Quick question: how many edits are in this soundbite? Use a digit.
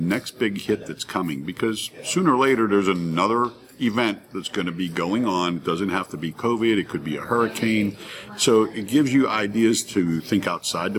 0